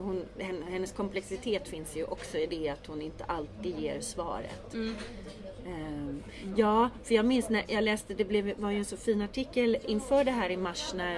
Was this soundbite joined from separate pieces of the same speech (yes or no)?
no